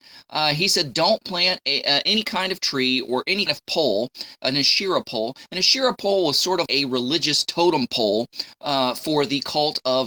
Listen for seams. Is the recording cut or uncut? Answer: cut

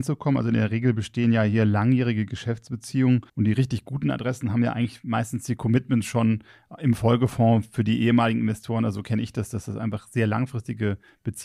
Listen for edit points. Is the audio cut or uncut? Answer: cut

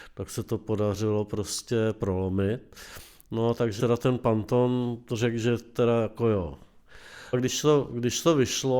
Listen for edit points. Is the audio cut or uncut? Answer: cut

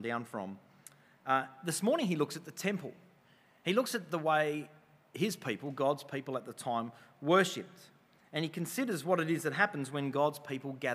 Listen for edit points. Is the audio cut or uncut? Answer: uncut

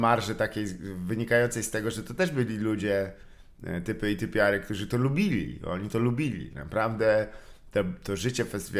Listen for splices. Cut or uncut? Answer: uncut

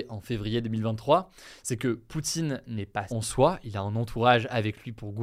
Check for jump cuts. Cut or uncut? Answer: cut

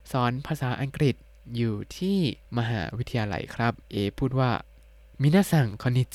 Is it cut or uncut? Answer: cut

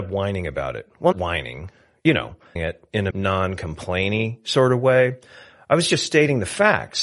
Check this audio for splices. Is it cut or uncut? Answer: cut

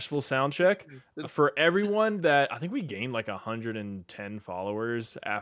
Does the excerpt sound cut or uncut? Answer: cut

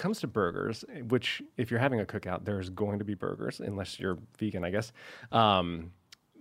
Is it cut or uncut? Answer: uncut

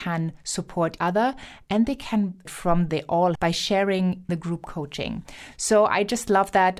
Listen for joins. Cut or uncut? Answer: cut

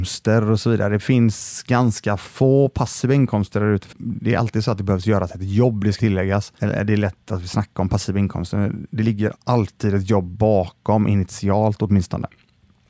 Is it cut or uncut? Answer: cut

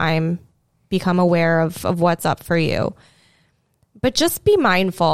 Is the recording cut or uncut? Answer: uncut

